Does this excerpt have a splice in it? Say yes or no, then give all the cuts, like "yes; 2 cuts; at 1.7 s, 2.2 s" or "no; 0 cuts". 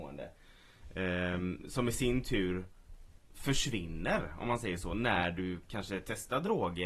yes; 1 cut; at 3.2 s